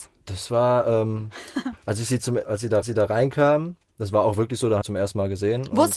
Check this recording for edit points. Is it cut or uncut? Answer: cut